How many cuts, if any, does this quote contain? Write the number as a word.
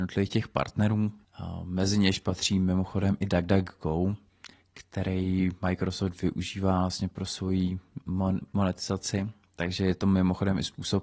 zero